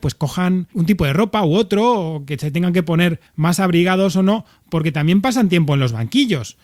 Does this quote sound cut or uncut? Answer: cut